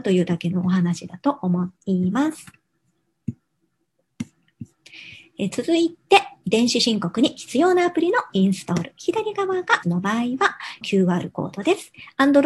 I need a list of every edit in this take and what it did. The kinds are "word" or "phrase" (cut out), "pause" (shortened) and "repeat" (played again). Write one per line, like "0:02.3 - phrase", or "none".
0:01.8 - pause
0:09.8 - phrase
0:10.8 - phrase

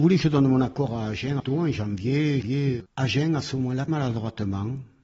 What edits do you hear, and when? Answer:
0:01.4 - word
0:03.9 - word

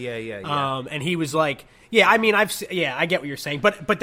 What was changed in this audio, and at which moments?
none

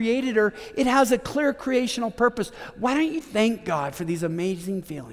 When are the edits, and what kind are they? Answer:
0:03.2 - word

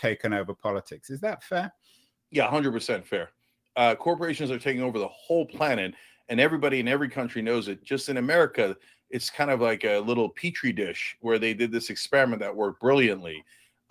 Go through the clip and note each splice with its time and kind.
none

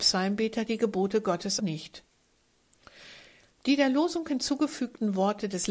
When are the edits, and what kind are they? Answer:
0:01.6 - word

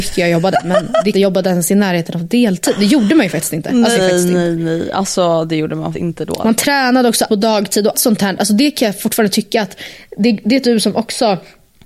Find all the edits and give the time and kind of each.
0:01.1 - phrase
0:03.9 - phrase
0:05.9 - word
0:07.3 - word
0:07.9 - word
0:10.6 - phrase

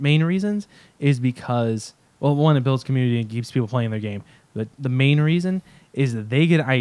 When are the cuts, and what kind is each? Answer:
none

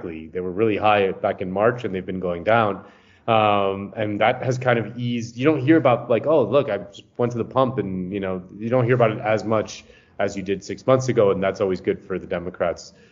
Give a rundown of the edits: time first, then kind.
none

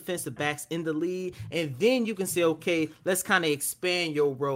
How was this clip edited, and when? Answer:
none

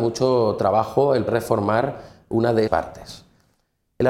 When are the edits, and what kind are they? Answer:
0:01.3 - word
0:02.7 - word

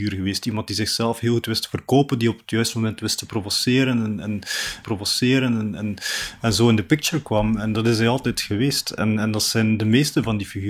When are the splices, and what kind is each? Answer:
0:04.8 - repeat

